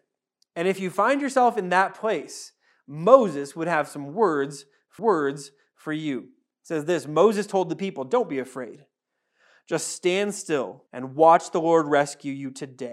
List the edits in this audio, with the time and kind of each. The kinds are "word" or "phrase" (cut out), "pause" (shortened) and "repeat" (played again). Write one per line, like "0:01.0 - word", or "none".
0:05.0 - repeat
0:10.9 - pause

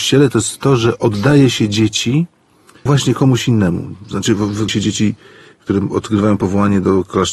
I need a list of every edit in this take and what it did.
0:02.9 - word
0:04.7 - phrase

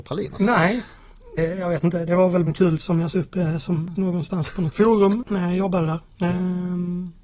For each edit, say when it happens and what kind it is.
0:01.4 - word
0:02.5 - word
0:02.8 - word
0:03.1 - word
0:04.0 - word
0:04.7 - word

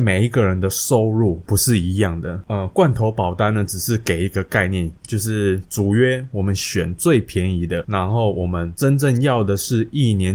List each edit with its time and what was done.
none

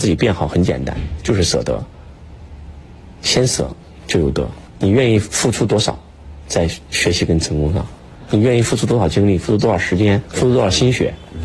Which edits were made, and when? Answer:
0:04.7 - pause

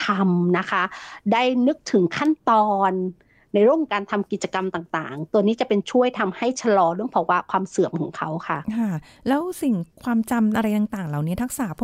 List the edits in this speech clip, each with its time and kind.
none

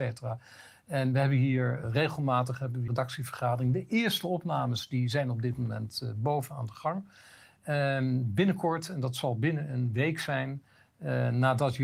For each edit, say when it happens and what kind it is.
0:01.8 - word
0:02.9 - word

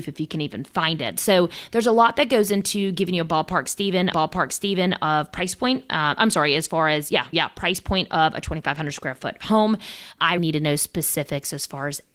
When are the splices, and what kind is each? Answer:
0:04.1 - repeat
0:07.3 - word
0:10.4 - word

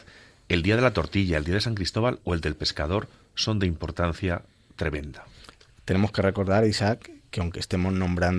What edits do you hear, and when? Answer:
none

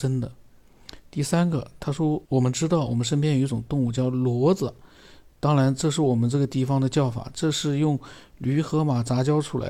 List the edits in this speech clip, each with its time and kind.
0:02.2 - pause

